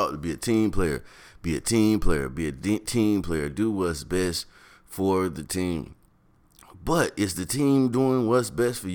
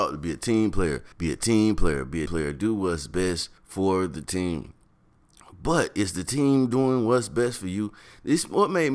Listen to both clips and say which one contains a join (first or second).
second